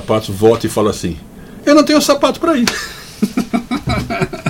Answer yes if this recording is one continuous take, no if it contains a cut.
yes